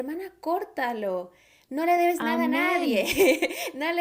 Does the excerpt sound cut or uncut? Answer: uncut